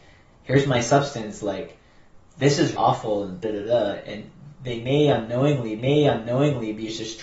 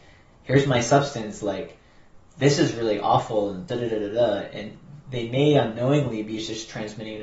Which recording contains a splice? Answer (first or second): first